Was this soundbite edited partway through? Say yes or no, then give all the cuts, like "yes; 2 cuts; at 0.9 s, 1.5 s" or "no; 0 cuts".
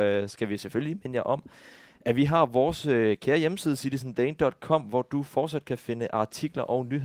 no; 0 cuts